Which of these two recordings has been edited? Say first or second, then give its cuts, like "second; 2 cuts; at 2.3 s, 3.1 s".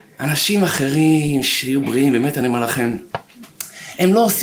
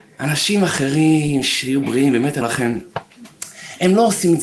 second; 1 cut; at 2.4 s